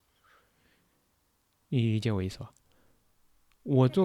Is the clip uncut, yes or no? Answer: yes